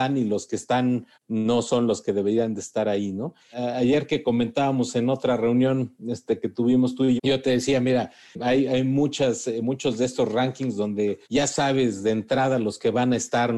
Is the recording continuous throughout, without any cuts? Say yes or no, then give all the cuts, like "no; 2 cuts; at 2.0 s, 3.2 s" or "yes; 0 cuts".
no; 3 cuts; at 1.1 s, 7.2 s, 11.2 s